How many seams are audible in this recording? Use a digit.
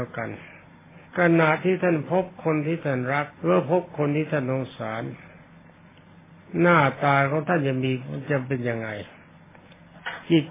2